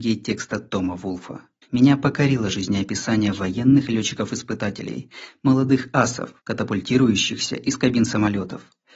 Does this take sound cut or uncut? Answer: cut